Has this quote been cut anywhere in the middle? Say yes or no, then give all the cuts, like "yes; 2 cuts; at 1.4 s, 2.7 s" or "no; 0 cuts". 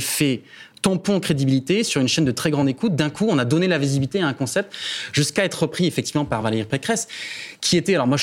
no; 0 cuts